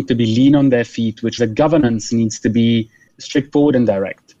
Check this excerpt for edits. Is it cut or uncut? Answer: cut